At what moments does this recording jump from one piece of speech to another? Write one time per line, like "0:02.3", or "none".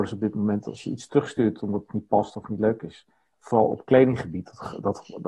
none